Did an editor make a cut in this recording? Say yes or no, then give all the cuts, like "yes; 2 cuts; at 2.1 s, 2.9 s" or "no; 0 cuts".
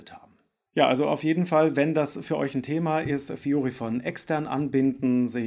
no; 0 cuts